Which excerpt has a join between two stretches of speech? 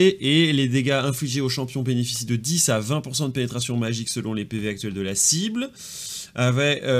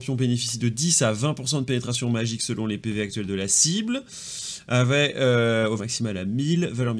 second; 1 cut; at 5.8 s

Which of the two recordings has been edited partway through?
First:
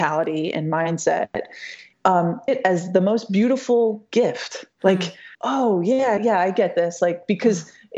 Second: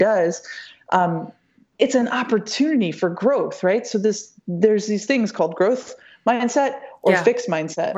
first; 4 cuts; at 1.9 s, 2.5 s, 5.3 s, 6.2 s

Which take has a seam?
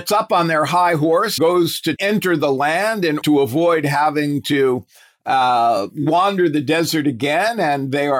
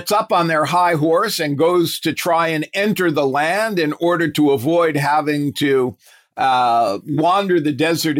first; 3 cuts; at 1.4 s, 2.0 s, 3.2 s

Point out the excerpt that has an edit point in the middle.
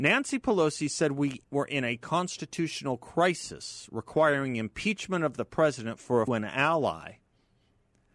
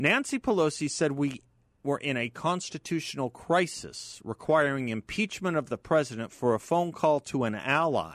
first; 2 cuts; at 1.4 s, 6.3 s

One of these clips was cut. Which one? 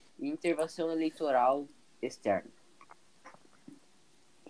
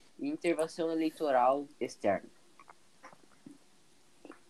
second; 1 cut; at 1.7 s

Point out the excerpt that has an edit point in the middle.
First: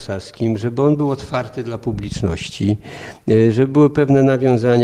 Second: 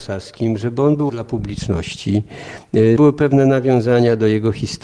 second; 2 cuts; at 1.1 s, 3.0 s

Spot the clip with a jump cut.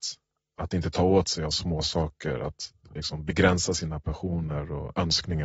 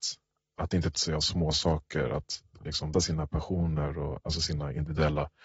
second; 3 cuts; at 0.9 s, 2.9 s, 4.2 s

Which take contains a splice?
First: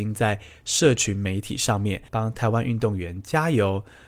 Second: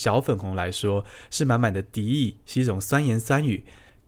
first; 1 cut; at 2.1 s

